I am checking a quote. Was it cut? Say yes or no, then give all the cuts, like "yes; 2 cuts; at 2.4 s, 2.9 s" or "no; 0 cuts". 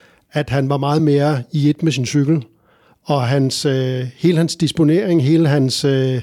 no; 0 cuts